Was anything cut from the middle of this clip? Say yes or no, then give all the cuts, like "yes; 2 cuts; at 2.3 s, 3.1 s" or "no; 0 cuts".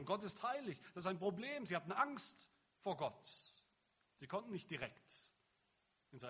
no; 0 cuts